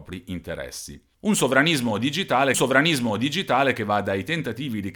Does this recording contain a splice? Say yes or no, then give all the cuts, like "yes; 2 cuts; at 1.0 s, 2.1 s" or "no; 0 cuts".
yes; 2 cuts; at 1.1 s, 2.5 s